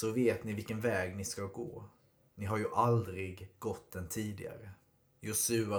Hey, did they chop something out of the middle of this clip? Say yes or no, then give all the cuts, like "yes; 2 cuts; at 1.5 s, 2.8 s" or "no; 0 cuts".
no; 0 cuts